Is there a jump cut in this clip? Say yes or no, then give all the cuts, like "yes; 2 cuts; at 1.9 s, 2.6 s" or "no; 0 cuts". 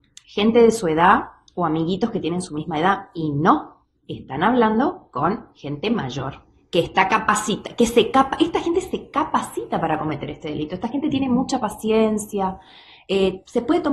no; 0 cuts